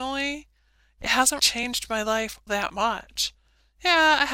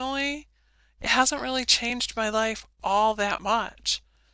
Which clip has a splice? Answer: first; 2 cuts; at 1.4 s, 2.5 s

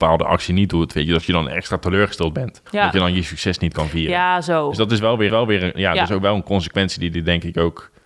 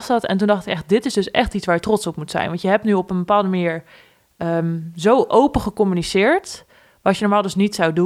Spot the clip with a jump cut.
first; 2 cuts; at 2.7 s, 5.3 s

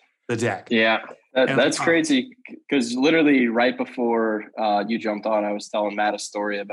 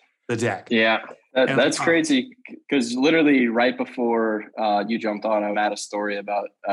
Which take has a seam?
second; 1 cut; at 5.5 s

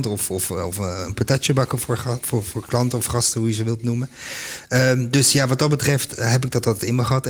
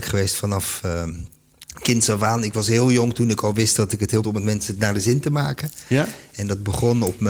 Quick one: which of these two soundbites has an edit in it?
second; 1 cut; at 4.2 s

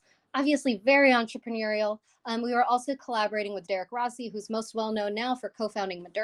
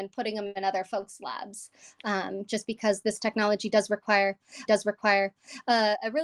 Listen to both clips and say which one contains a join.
second; 1 cut; at 4.7 s

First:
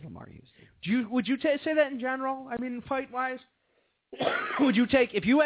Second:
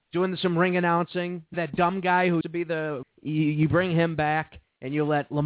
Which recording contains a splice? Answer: second; 3 cuts; at 1.5 s, 2.4 s, 3.0 s

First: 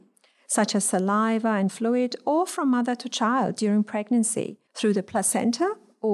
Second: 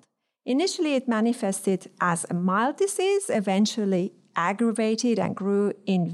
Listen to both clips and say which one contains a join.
first; 2 cuts; at 1.7 s, 4.7 s

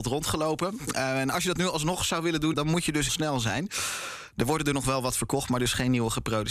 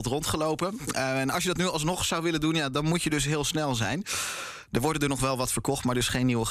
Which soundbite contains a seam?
first; 2 cuts; at 2.5 s, 3.1 s

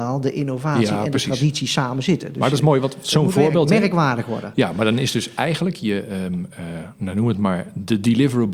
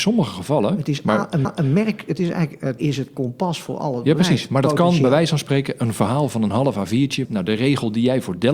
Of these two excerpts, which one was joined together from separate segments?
second; 3 cuts; at 1.4 s, 2.8 s, 7.2 s

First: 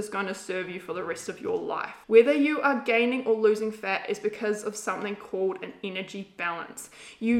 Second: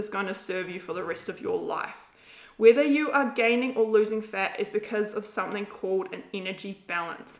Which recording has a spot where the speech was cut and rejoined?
first; 1 cut; at 2.0 s

